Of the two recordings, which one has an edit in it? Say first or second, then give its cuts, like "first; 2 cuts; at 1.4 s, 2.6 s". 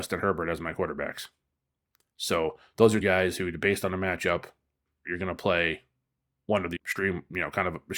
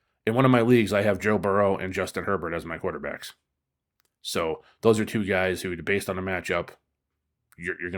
first; 3 cuts; at 3.0 s, 5.0 s, 6.8 s